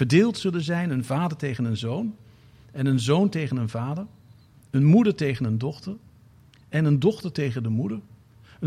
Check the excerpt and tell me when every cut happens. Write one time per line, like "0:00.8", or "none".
none

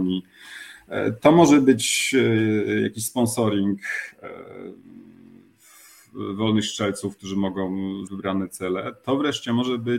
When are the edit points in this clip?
0:08.1

